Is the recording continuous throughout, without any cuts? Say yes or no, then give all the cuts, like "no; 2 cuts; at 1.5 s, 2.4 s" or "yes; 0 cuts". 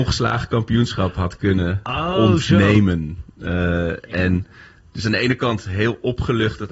yes; 0 cuts